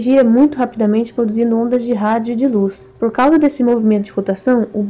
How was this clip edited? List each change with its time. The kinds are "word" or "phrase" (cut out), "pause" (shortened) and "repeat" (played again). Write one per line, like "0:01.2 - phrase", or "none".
0:02.9 - pause